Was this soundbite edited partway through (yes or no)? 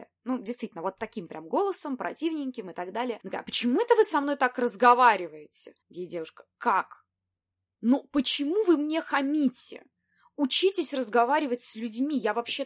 yes